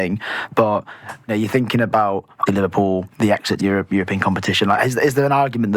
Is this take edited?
yes; 4 cuts; at 1.3 s, 2.5 s, 3.1 s, 3.6 s

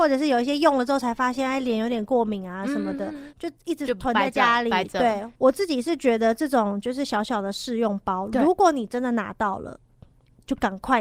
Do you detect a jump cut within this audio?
yes; 1 cut; at 5.4 s

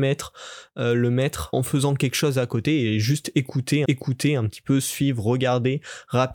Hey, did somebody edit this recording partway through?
yes; 2 cuts; at 1.5 s, 3.8 s

